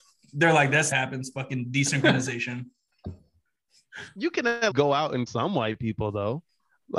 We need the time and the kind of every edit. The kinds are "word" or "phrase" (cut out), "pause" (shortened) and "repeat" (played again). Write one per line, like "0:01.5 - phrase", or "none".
0:00.9 - phrase
0:04.7 - word
0:05.3 - word